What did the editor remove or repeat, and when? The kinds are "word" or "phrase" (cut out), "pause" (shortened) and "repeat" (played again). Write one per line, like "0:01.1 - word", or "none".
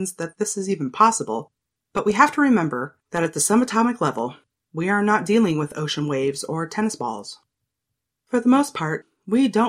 none